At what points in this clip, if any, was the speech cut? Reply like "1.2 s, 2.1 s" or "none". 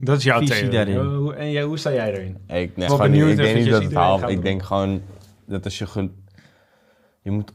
2.9 s